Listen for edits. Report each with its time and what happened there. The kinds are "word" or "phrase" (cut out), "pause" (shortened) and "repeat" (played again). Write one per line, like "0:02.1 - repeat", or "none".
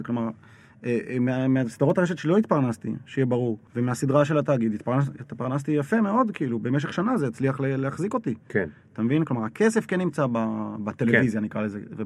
0:03.7 - pause